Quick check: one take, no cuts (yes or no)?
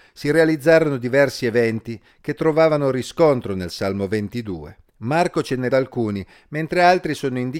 no